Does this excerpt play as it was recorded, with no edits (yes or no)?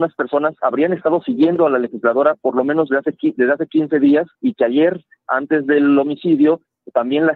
no